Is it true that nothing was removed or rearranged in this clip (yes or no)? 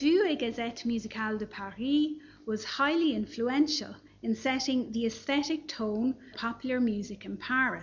no